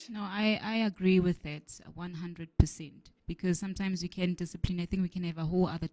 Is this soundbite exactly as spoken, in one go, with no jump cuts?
no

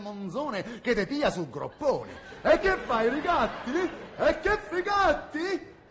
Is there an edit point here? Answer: yes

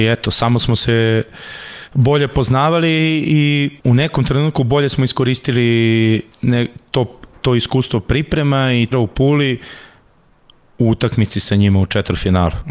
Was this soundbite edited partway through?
yes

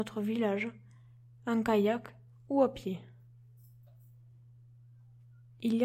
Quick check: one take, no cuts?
yes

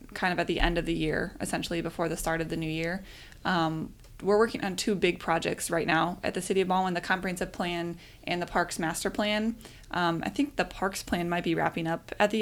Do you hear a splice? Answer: no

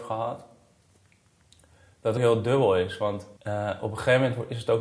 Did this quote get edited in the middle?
yes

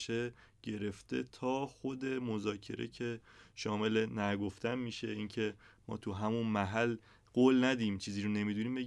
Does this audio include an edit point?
no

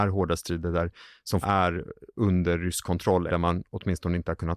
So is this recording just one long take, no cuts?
no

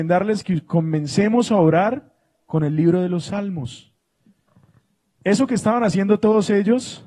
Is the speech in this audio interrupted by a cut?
no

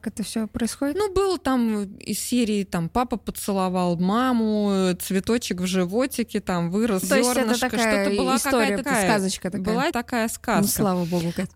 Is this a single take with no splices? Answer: no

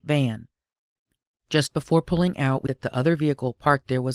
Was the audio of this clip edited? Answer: yes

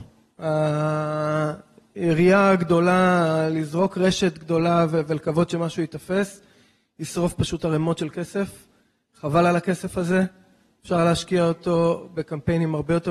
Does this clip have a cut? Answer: no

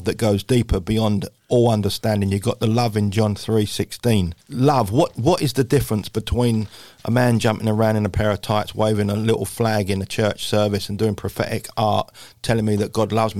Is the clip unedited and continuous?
no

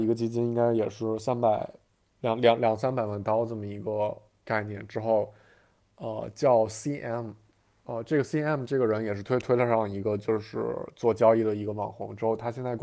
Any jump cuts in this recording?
no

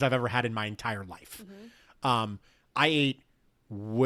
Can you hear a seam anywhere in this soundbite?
no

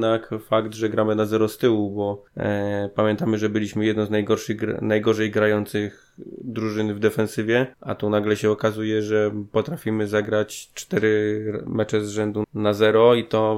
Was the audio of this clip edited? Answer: yes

